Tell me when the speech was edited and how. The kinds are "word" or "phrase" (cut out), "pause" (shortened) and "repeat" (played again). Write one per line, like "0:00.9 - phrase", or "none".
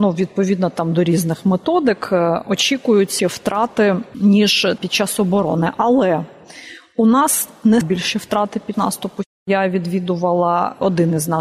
0:03.2 - word
0:04.8 - word
0:07.8 - word
0:08.7 - word